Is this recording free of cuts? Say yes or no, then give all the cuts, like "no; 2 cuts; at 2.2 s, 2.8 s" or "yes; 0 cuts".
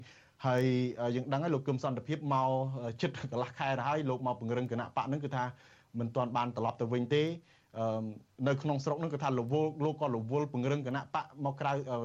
yes; 0 cuts